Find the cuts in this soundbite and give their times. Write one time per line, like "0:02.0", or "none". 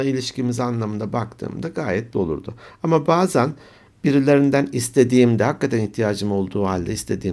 0:02.1